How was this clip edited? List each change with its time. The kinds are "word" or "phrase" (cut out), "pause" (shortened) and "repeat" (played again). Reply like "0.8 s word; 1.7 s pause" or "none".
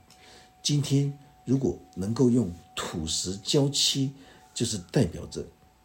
none